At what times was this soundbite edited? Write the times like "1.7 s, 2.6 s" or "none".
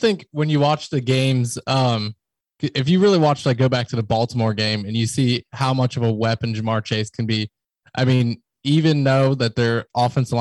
none

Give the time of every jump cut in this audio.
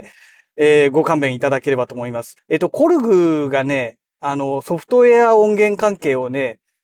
2.4 s

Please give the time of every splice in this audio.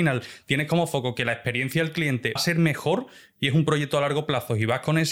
2.4 s

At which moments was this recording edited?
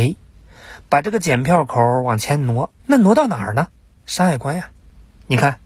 2.8 s, 3.8 s

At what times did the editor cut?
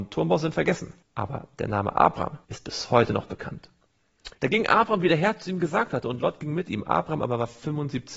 1.0 s, 2.4 s, 4.3 s

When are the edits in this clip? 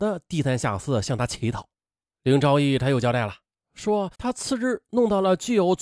4.1 s

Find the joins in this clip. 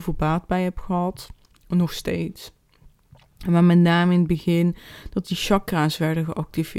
none

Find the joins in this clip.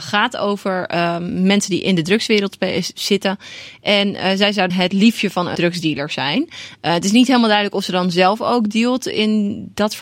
4.7 s, 5.5 s

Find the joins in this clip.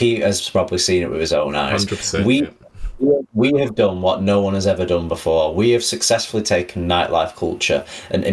none

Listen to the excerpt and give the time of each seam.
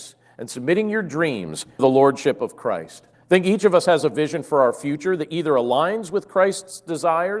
1.8 s, 3.1 s

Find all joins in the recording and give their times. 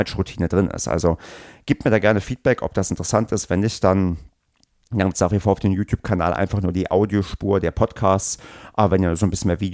none

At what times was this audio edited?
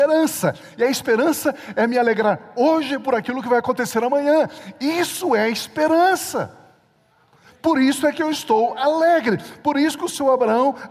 none

